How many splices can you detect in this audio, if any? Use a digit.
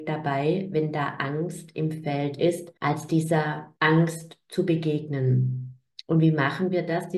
2